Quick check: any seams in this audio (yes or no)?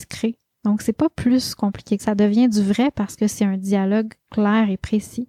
yes